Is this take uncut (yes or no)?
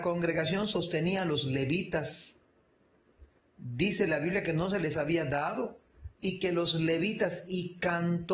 yes